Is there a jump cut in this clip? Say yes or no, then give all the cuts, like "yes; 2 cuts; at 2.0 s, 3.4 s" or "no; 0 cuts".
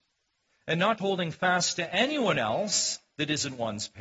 yes; 1 cut; at 1.0 s